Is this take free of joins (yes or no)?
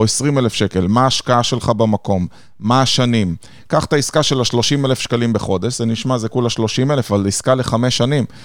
yes